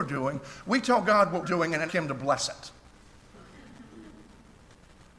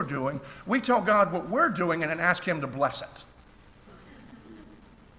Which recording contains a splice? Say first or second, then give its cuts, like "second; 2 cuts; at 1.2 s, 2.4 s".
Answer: first; 2 cuts; at 1.4 s, 1.9 s